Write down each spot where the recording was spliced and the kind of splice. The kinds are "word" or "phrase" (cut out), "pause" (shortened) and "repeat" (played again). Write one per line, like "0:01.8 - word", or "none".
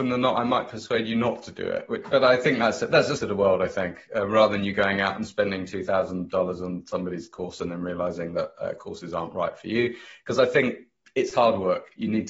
0:03.2 - word